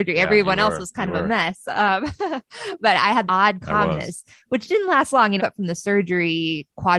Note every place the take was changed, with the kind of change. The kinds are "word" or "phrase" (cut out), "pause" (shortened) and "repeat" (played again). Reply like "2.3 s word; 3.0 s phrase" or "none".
3.3 s word; 5.4 s phrase